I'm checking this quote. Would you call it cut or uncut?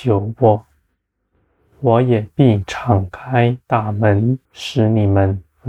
cut